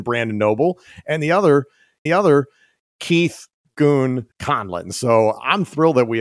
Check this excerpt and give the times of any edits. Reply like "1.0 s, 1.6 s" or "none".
2.1 s, 4.3 s